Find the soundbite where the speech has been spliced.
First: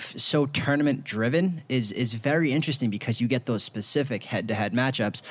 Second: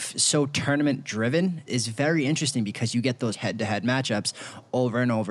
second; 2 cuts; at 1.7 s, 3.3 s

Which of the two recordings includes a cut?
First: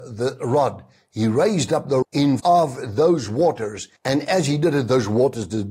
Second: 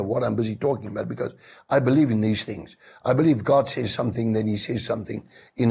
first; 3 cuts; at 2.0 s, 2.4 s, 4.0 s

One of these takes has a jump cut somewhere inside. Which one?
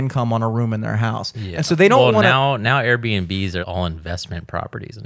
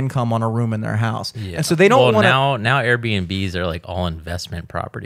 first; 1 cut; at 3.6 s

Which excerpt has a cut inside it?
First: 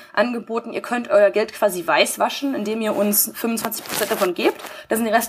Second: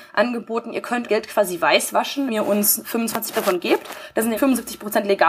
second; 4 cuts; at 1.1 s, 2.3 s, 3.3 s, 4.4 s

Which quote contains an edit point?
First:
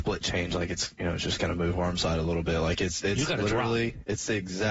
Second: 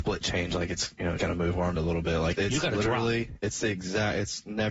second; 3 cuts; at 1.2 s, 1.8 s, 2.3 s

